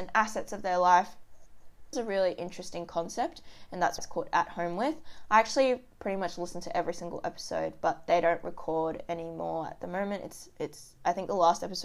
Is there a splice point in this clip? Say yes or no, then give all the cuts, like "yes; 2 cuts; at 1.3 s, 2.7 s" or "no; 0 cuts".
yes; 2 cuts; at 1.9 s, 4.0 s